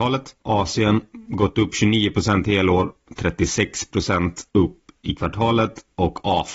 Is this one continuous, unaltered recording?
no; 1 cut; at 4.5 s

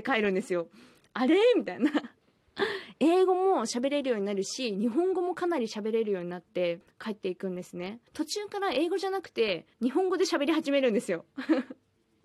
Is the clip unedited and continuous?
no; 2 cuts; at 8.1 s, 9.7 s

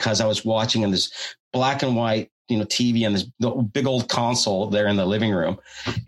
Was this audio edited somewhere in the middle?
no; 0 cuts

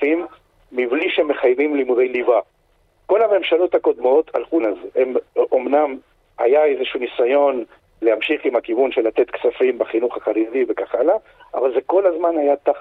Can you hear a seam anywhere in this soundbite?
yes; 2 cuts; at 4.6 s, 8.0 s

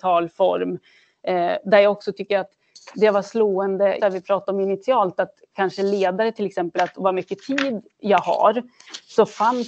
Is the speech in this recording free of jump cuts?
no; 2 cuts; at 4.0 s, 6.8 s

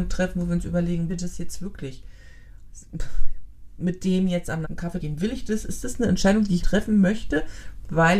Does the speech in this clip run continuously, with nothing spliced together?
no; 4 cuts; at 1.1 s, 4.6 s, 5.0 s, 6.6 s

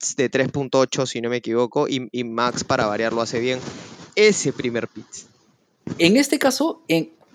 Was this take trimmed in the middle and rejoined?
yes; 1 cut; at 4.1 s

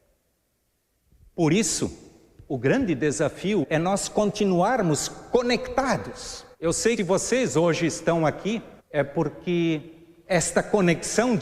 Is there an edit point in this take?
yes; 4 cuts; at 3.6 s, 6.5 s, 7.0 s, 8.8 s

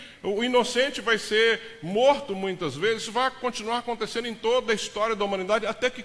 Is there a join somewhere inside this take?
no; 0 cuts

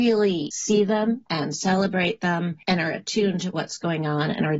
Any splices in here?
yes; 1 cut; at 2.6 s

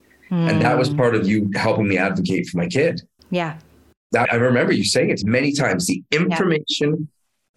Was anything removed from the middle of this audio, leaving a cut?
yes; 3 cuts; at 3.2 s, 4.2 s, 5.2 s

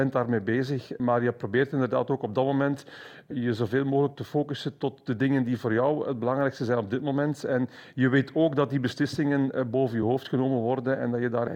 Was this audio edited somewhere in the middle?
no; 0 cuts

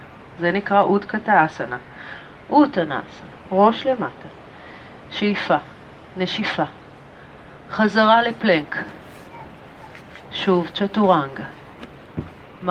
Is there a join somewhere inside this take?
yes; 1 cut; at 3.4 s

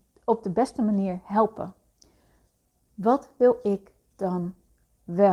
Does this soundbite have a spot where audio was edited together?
no; 0 cuts

